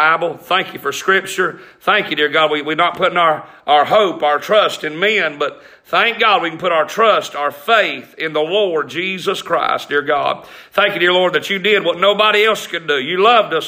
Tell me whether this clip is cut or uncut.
uncut